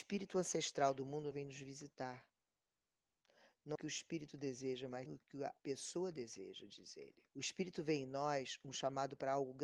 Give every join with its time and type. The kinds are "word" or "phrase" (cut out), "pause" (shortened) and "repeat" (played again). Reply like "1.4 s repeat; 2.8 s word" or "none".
1.3 s word; 3.8 s phrase; 5.1 s word; 5.6 s pause; 7.3 s pause